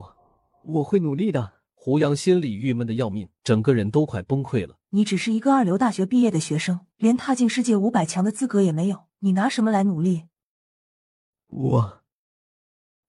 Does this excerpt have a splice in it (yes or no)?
yes